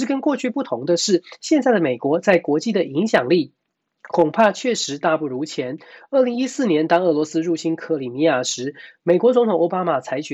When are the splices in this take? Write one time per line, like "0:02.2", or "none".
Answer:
none